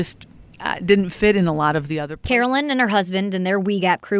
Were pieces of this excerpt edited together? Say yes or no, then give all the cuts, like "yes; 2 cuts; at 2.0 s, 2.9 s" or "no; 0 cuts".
no; 0 cuts